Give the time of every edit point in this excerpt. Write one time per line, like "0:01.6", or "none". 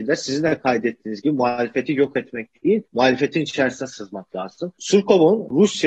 0:02.8